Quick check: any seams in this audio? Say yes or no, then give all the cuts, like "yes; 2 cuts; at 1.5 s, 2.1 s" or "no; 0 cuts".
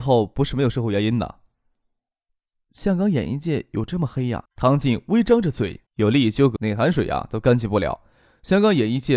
yes; 3 cuts; at 4.4 s, 5.9 s, 6.6 s